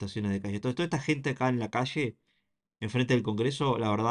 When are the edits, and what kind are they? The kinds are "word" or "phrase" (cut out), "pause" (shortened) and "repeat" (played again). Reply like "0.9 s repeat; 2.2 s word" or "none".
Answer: none